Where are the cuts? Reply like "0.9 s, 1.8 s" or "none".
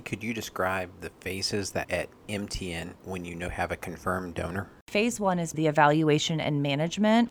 1.8 s, 3.5 s, 5.5 s